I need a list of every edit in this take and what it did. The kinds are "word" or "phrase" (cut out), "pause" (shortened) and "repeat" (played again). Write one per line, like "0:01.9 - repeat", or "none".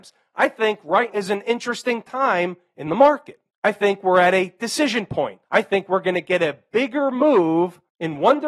0:01.1 - word
0:05.4 - pause